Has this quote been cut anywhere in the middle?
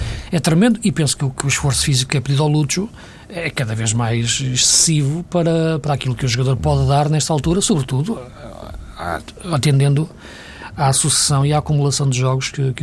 yes; 1 cut; at 5.8 s

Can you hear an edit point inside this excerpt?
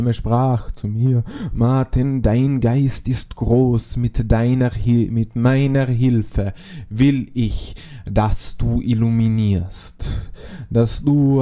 no; 0 cuts

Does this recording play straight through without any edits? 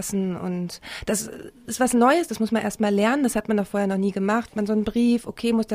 no; 1 cut; at 4.5 s

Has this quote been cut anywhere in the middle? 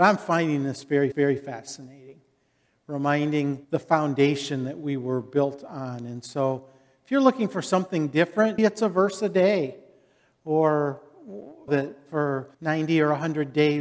yes; 5 cuts; at 1.1 s, 3.6 s, 8.6 s, 11.7 s, 12.5 s

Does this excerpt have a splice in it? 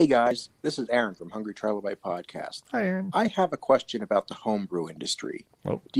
no; 0 cuts

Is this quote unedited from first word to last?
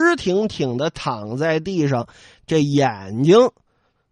yes; 0 cuts

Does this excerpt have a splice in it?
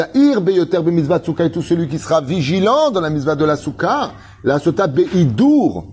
no; 0 cuts

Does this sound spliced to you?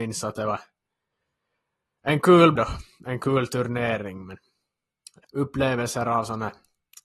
yes; 2 cuts; at 2.6 s, 5.2 s

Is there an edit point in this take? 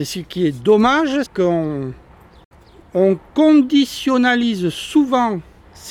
yes; 1 cut; at 1.3 s

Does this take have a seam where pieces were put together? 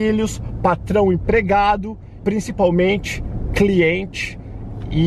yes; 1 cut; at 2.2 s

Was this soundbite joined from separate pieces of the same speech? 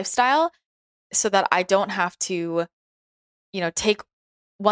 no; 0 cuts

